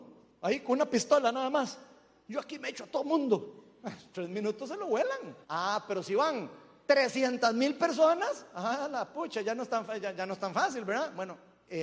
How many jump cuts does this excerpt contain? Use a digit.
1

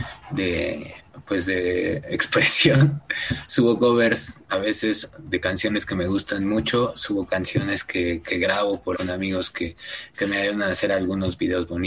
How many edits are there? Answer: 1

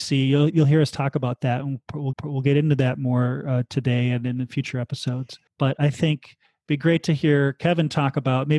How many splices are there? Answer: 2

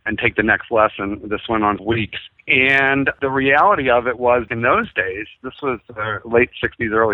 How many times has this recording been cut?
2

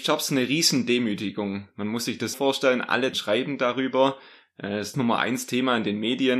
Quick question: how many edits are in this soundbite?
3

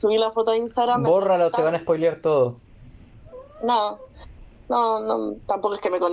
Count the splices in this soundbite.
0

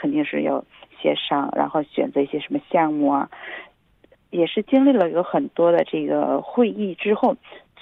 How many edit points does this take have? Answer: 0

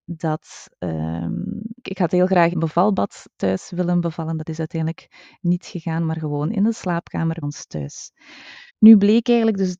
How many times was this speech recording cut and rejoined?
4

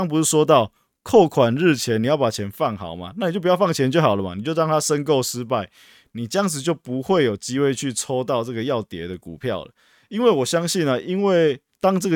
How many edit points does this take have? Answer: 0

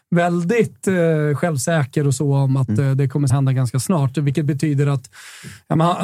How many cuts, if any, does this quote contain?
1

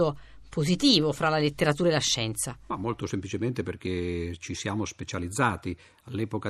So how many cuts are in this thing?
0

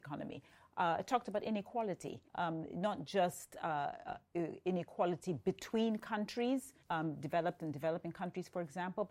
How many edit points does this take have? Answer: 2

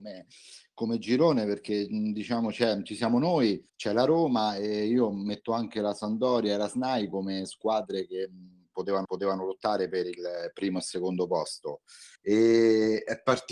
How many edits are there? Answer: 3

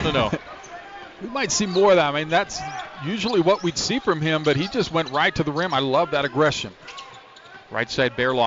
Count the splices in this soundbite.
0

